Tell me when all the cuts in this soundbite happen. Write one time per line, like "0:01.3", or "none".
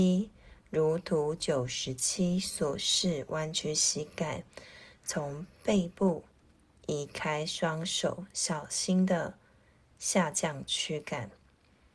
none